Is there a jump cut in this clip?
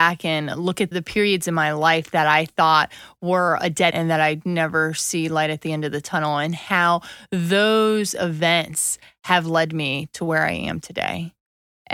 yes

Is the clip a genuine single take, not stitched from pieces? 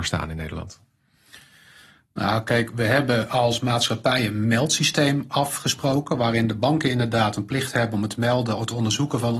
yes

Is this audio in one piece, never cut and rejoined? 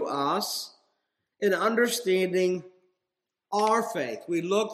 yes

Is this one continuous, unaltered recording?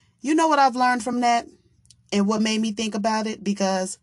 yes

